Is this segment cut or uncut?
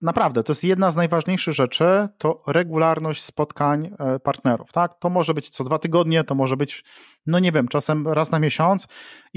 uncut